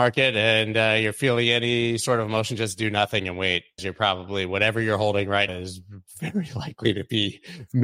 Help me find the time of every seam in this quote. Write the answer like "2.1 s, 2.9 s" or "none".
3.8 s, 5.5 s